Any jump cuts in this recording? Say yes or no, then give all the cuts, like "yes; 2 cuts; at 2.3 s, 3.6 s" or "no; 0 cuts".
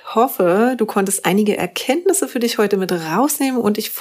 no; 0 cuts